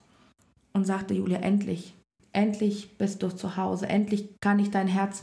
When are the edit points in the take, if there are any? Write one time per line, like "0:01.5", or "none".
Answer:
none